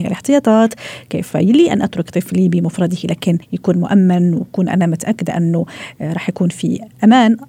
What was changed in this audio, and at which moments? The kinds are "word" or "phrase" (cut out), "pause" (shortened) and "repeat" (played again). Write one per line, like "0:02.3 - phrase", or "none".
0:03.4 - pause